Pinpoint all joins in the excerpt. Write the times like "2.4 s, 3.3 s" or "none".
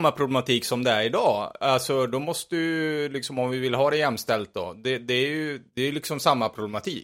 5.7 s